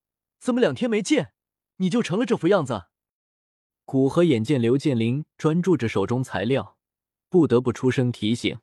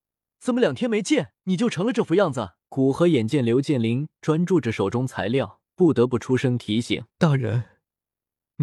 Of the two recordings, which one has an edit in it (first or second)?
second